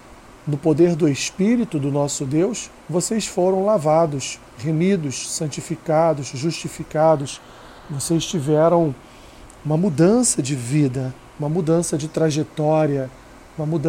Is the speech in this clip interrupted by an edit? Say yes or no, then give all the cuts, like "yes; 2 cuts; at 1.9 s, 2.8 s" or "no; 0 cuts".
yes; 4 cuts; at 2.8 s, 4.5 s, 7.8 s, 11.2 s